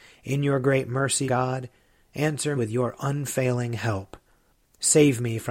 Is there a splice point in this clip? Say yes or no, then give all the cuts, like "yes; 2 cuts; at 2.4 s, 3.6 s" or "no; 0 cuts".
yes; 2 cuts; at 1.3 s, 2.6 s